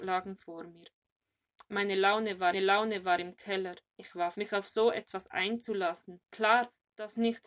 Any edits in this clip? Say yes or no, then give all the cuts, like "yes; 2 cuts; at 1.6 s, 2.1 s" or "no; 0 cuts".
yes; 4 cuts; at 2.5 s, 3.9 s, 4.3 s, 6.2 s